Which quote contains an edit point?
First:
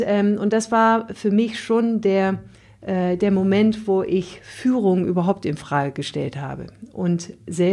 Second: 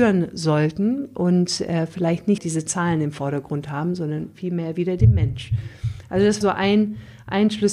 second; 2 cuts; at 2.4 s, 6.4 s

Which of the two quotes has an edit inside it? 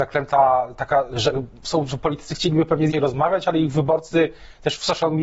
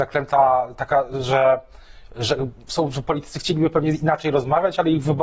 first; 2 cuts; at 1.1 s, 2.9 s

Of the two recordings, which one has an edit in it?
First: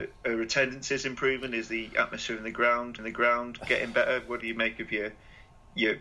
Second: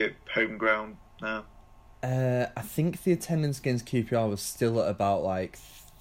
first; 2 cuts; at 3.0 s, 4.4 s

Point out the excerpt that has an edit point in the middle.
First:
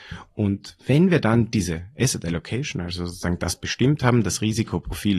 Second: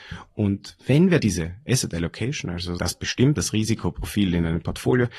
second; 3 cuts; at 1.2 s, 2.8 s, 3.4 s

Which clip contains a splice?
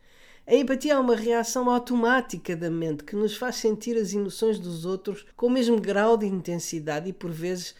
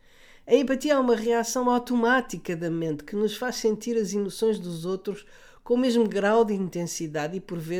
first; 1 cut; at 5.3 s

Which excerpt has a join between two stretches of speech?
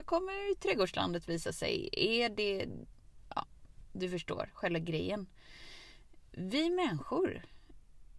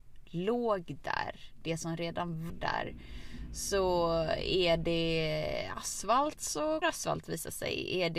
second; 2 cuts; at 2.5 s, 6.8 s

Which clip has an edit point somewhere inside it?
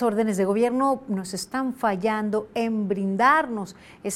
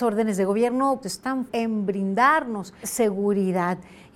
second; 3 cuts; at 1.0 s, 1.5 s, 2.8 s

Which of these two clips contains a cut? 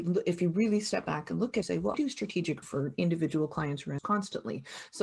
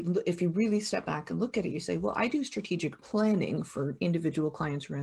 first; 4 cuts; at 1.6 s, 1.9 s, 2.6 s, 4.0 s

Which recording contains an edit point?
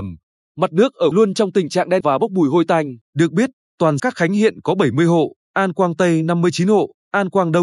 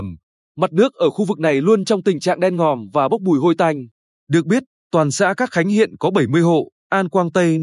first; 4 cuts; at 1.1 s, 2.0 s, 3.0 s, 4.0 s

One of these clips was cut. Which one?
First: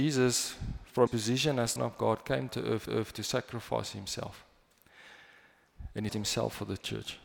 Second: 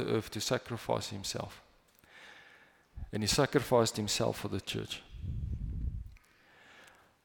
first; 5 cuts; at 1.1 s, 1.8 s, 2.5 s, 2.9 s, 6.1 s

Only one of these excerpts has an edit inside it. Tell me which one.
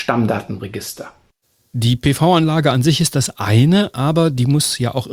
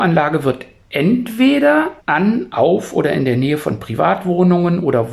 second; 1 cut; at 2.0 s

